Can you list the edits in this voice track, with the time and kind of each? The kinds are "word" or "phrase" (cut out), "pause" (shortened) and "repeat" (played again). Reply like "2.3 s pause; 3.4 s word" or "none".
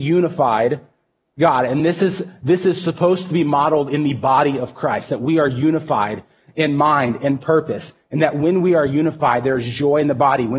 none